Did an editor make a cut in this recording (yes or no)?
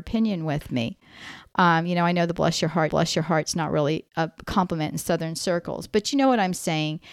yes